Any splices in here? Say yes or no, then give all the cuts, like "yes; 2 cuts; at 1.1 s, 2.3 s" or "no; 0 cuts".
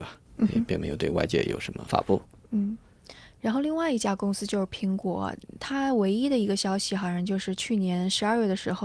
no; 0 cuts